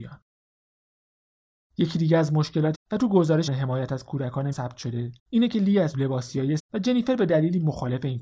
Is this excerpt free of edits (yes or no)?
no